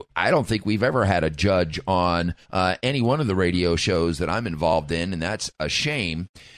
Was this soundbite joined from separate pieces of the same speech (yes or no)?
yes